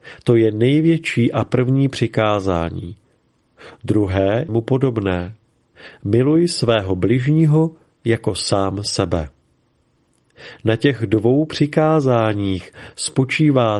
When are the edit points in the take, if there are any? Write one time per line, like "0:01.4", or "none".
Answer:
0:04.5